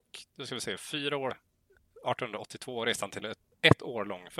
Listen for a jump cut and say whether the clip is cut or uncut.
cut